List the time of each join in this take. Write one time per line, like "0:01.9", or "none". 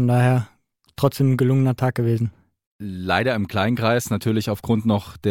none